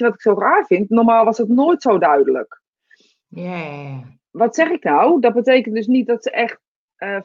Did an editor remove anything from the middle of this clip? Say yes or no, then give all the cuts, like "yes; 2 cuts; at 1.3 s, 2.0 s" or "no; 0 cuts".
no; 0 cuts